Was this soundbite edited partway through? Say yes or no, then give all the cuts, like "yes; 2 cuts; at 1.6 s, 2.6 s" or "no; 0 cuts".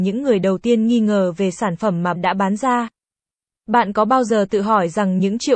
yes; 1 cut; at 2.1 s